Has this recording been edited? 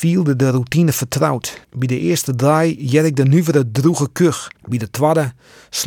yes; 2 cuts; at 1.6 s, 4.6 s

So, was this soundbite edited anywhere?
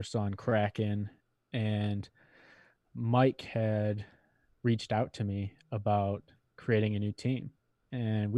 no; 0 cuts

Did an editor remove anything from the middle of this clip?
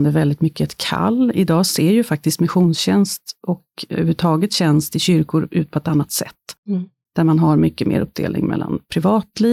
no; 0 cuts

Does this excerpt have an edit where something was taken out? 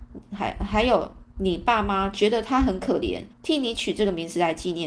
yes; 1 cut; at 3.3 s

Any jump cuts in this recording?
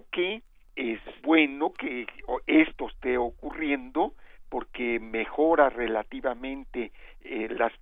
yes; 1 cut; at 1.2 s

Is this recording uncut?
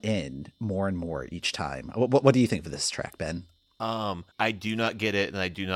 no; 1 cut; at 4.3 s

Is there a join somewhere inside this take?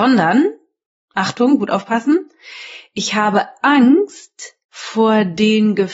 yes; 1 cut; at 4.6 s

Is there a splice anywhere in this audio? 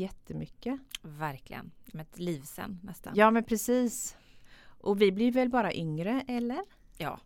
yes; 1 cut; at 1.9 s

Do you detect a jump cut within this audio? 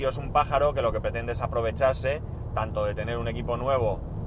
no; 0 cuts

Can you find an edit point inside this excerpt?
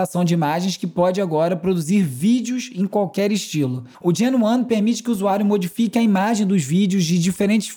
yes; 1 cut; at 3.9 s

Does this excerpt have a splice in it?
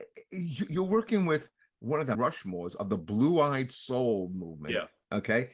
yes; 1 cut; at 2.1 s

